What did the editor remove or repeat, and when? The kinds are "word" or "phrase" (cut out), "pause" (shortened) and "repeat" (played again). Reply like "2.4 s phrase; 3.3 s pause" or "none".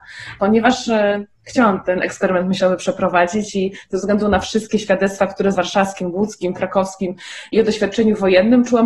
5.5 s phrase